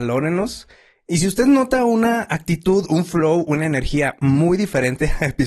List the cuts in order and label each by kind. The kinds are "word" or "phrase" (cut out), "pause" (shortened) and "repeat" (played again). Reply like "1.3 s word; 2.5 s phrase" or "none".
none